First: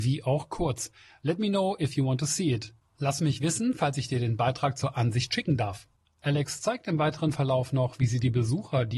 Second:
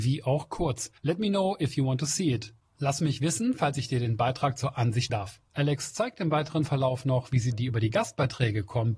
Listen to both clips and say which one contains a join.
second; 4 cuts; at 1.0 s, 5.1 s, 5.5 s, 7.5 s

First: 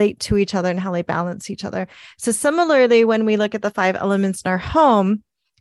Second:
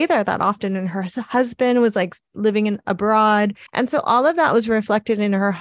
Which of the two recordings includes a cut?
second; 1 cut; at 3.7 s

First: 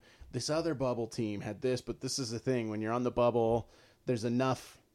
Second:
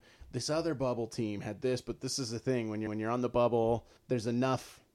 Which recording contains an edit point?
second; 2 cuts; at 2.9 s, 4.0 s

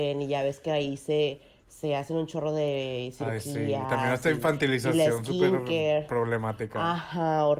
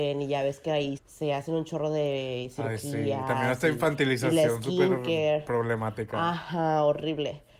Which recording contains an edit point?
second; 1 cut; at 1.0 s

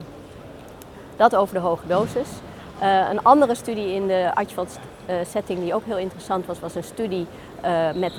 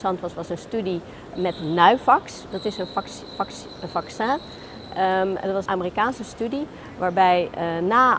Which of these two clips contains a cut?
second; 3 cuts; at 1.4 s, 3.3 s, 5.7 s

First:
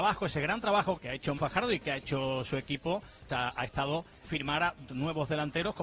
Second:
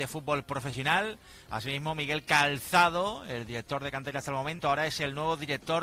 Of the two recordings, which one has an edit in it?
first; 5 cuts; at 1.0 s, 1.4 s, 3.3 s, 4.2 s, 4.9 s

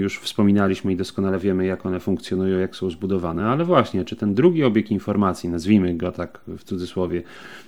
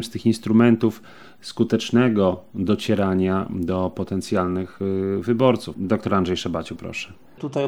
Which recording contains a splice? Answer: second; 1 cut; at 6.8 s

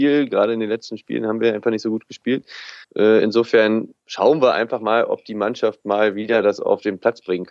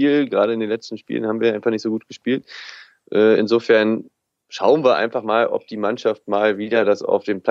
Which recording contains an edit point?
first; 2 cuts; at 2.8 s, 4.0 s

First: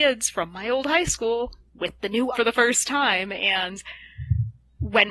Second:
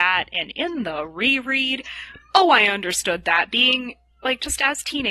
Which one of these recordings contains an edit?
first; 1 cut; at 2.3 s

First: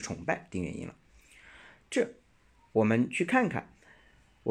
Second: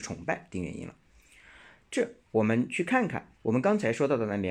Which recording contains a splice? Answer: second; 2 cuts; at 2.3 s, 3.3 s

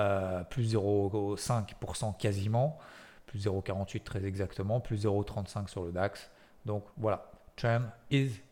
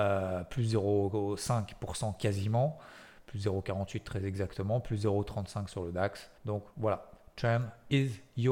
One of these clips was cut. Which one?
second; 1 cut; at 6.4 s

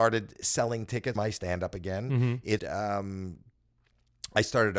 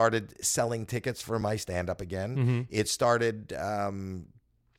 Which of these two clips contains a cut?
first; 2 cuts; at 1.2 s, 2.6 s

